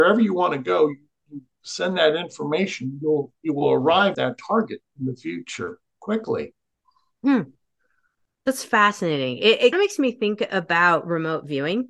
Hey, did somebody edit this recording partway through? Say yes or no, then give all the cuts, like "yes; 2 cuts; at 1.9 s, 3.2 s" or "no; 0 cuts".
yes; 2 cuts; at 4.1 s, 9.7 s